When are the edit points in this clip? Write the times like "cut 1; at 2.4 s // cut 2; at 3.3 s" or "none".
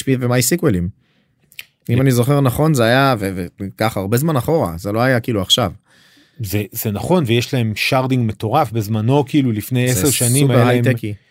none

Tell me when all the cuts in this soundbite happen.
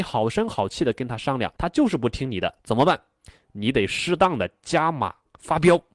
cut 1; at 1.6 s // cut 2; at 2.6 s

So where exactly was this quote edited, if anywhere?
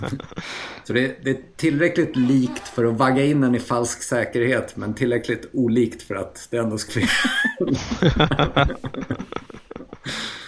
cut 1; at 6.9 s

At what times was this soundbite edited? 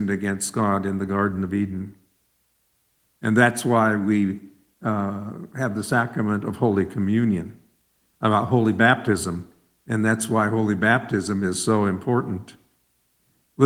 none

